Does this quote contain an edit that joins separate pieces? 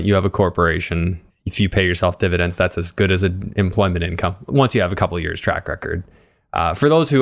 yes; 1 cut; at 1.3 s

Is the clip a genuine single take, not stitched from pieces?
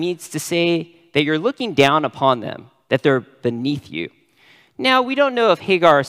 yes; 0 cuts

